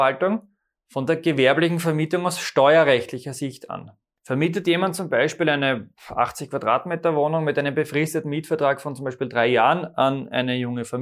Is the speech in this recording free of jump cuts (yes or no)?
yes